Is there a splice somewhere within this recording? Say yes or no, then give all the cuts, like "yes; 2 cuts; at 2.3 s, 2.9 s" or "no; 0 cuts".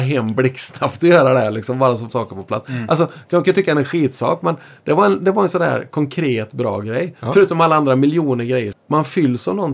yes; 2 cuts; at 2.1 s, 8.7 s